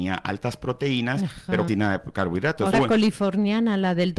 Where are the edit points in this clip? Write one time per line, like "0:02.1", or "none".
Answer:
0:01.7
0:02.7